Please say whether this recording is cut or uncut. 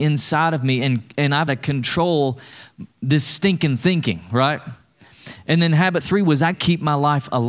cut